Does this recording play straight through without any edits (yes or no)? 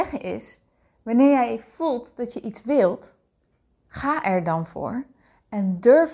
yes